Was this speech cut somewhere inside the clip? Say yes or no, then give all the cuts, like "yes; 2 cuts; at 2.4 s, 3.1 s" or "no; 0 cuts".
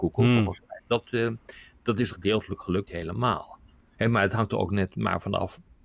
yes; 2 cuts; at 2.1 s, 2.9 s